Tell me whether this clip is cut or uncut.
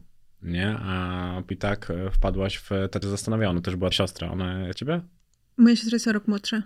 cut